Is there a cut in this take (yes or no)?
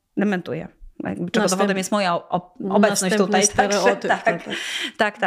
no